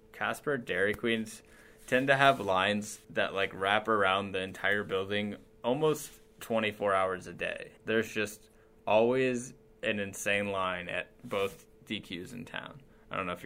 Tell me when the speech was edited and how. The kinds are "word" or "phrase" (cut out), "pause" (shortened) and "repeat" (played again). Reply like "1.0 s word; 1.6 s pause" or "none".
3.0 s pause; 7.8 s pause